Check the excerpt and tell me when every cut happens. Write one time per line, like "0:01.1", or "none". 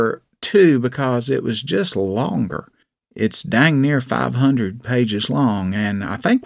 0:02.8